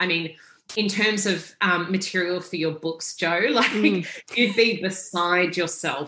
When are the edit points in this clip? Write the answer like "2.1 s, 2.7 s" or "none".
none